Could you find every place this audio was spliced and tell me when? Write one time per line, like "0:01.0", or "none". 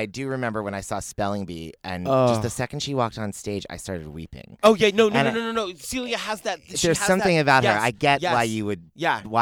none